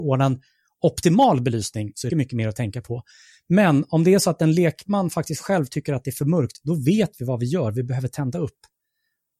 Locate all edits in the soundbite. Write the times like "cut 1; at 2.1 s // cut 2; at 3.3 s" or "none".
cut 1; at 2.1 s